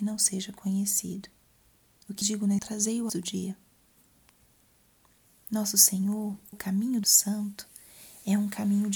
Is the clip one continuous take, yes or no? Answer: no